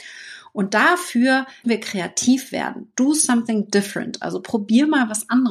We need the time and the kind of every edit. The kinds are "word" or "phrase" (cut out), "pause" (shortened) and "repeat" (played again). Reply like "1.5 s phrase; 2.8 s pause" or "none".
1.6 s word